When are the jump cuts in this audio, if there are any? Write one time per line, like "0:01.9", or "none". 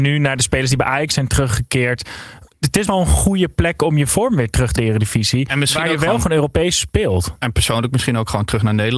0:02.5
0:02.9
0:04.8